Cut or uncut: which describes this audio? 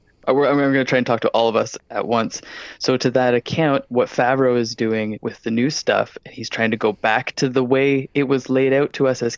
cut